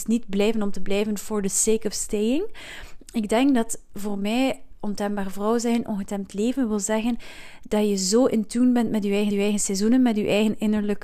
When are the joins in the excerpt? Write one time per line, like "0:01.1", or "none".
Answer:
0:09.3